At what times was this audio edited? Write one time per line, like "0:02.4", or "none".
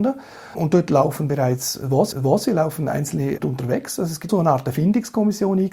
0:02.1
0:03.4
0:04.3